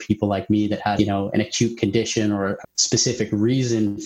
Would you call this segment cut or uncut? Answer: cut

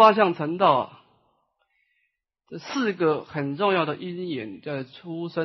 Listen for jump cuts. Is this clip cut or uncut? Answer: uncut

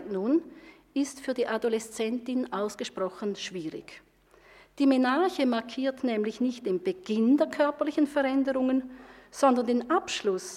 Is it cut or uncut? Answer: uncut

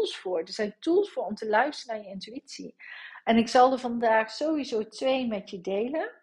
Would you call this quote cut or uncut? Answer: uncut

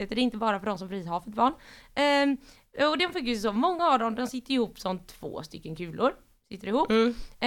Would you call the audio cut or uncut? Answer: uncut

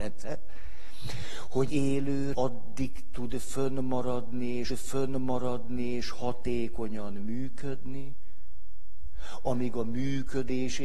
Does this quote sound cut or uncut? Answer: cut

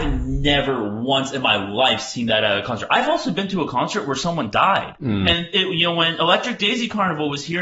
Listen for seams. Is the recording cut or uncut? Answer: uncut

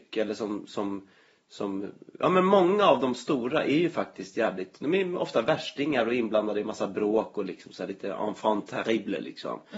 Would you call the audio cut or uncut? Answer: uncut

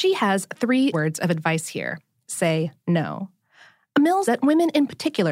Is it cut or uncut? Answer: cut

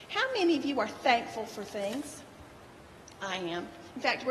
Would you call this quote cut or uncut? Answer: uncut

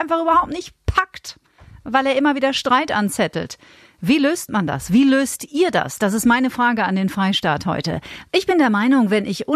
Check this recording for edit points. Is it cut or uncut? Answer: uncut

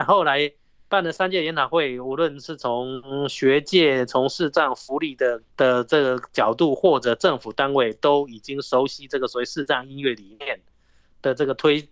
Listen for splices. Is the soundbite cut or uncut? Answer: cut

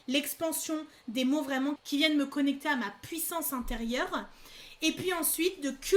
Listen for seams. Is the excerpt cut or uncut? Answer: uncut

